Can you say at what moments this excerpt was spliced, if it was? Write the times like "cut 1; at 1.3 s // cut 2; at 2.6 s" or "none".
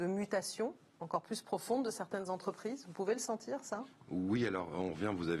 none